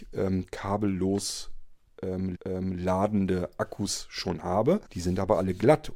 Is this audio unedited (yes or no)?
no